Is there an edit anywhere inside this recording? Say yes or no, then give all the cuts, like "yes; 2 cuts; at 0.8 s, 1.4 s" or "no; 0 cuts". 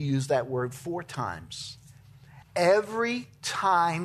yes; 1 cut; at 2.4 s